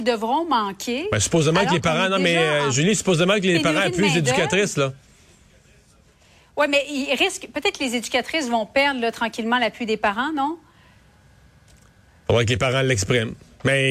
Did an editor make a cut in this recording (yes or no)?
no